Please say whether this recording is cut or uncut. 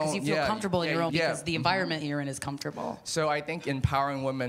cut